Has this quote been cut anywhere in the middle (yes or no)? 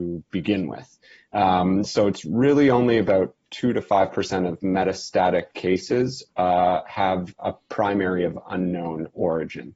yes